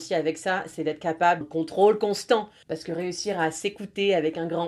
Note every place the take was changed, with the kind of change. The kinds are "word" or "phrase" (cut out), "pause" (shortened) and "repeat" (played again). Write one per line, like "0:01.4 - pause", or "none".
0:01.4 - phrase